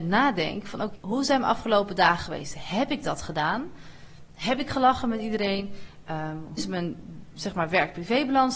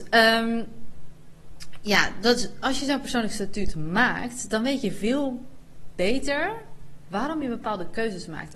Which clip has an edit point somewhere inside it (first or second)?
first